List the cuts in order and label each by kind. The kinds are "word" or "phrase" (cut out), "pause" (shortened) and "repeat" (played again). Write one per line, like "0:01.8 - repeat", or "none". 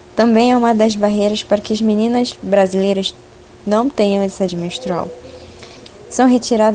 0:04.5 - word